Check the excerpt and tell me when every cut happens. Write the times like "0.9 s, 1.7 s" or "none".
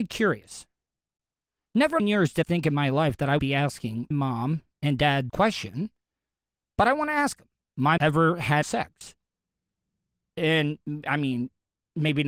2.0 s, 2.4 s, 3.4 s, 4.1 s, 5.3 s, 7.6 s, 8.0 s, 8.6 s